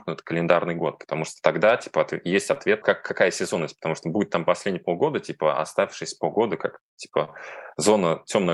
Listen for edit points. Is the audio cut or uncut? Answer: cut